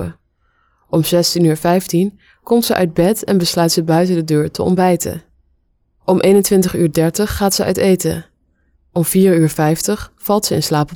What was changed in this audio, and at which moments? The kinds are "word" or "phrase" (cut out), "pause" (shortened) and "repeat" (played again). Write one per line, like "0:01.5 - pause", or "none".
none